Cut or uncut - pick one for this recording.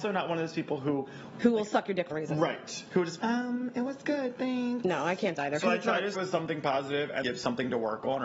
cut